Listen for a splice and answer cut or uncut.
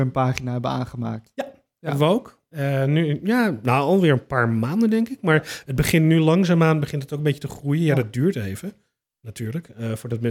uncut